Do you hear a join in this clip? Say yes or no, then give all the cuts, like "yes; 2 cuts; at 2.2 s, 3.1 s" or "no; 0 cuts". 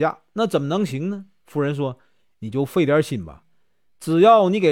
no; 0 cuts